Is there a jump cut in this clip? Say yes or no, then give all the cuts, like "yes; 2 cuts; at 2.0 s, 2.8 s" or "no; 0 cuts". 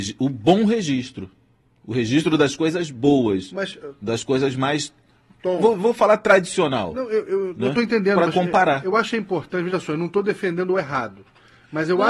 no; 0 cuts